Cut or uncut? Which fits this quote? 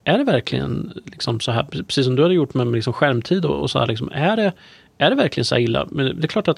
uncut